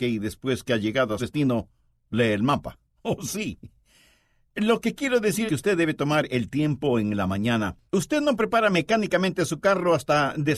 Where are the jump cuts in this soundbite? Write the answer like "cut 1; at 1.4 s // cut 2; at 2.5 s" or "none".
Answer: cut 1; at 1.2 s // cut 2; at 2.8 s // cut 3; at 5.5 s // cut 4; at 7.9 s